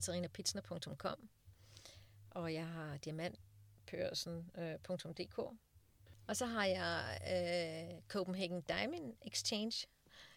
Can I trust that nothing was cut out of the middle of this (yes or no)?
yes